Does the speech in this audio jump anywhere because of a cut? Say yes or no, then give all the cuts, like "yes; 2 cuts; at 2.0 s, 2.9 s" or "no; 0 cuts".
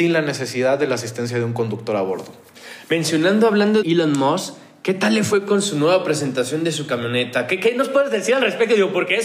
yes; 1 cut; at 3.8 s